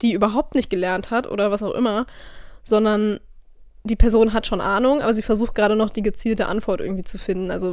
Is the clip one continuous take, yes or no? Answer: yes